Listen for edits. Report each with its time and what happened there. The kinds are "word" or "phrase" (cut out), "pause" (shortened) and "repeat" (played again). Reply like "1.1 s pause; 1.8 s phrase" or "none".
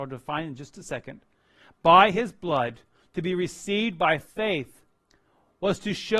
none